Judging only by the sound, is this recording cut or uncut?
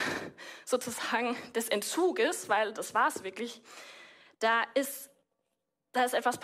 uncut